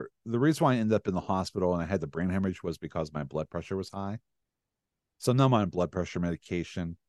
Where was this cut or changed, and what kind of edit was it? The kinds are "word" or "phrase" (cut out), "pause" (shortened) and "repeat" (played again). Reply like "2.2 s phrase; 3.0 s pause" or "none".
none